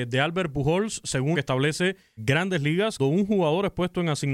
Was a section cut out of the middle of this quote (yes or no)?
yes